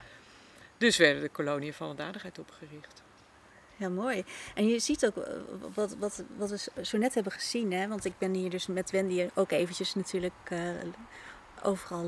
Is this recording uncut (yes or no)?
yes